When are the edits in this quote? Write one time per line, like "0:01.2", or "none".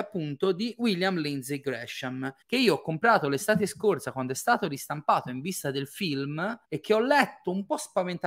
0:02.4
0:06.6